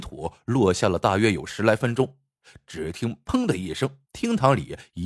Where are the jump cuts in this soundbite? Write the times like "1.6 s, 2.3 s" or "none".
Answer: 4.0 s